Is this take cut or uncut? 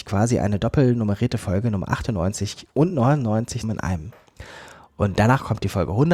cut